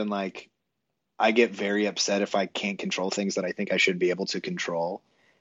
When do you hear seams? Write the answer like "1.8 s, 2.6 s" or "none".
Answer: none